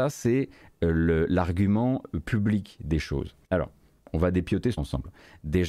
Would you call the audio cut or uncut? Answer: cut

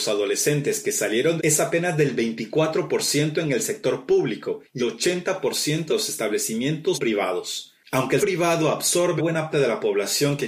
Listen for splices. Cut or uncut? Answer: cut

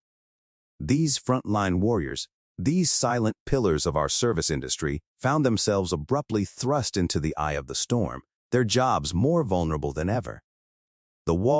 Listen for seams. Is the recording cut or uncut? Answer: uncut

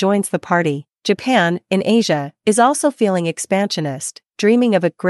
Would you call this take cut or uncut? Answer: cut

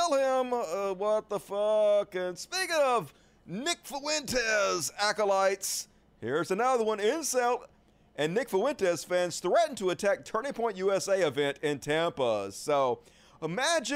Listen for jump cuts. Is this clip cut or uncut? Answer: uncut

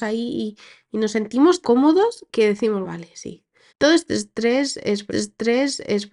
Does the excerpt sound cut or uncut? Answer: cut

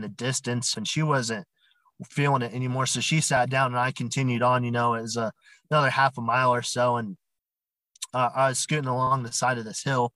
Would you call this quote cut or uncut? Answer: uncut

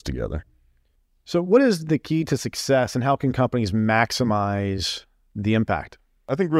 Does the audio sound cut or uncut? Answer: uncut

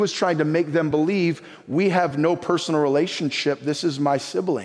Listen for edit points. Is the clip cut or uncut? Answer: uncut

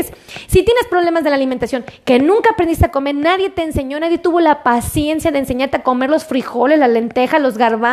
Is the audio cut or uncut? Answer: uncut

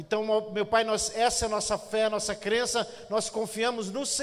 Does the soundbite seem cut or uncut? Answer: uncut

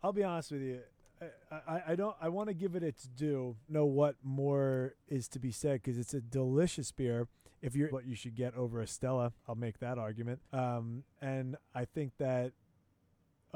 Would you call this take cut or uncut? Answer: cut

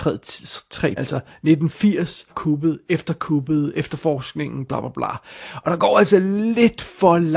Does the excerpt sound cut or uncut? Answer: cut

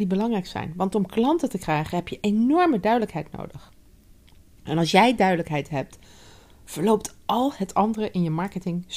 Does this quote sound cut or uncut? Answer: uncut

